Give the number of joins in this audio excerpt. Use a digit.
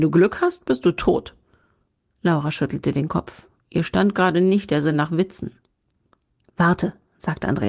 0